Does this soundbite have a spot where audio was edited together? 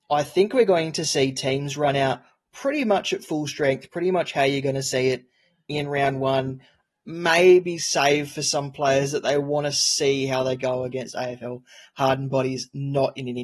no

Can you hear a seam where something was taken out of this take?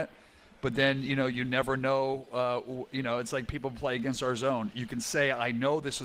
no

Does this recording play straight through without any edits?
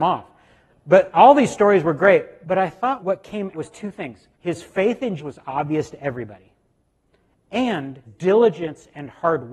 no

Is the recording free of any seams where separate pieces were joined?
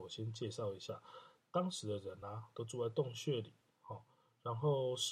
yes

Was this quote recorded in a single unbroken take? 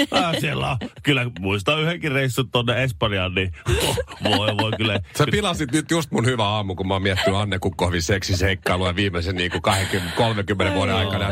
yes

